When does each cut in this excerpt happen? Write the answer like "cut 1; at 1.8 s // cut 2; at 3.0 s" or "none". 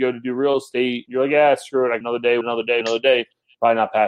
cut 1; at 1.1 s // cut 2; at 2.0 s // cut 3; at 2.4 s // cut 4; at 2.8 s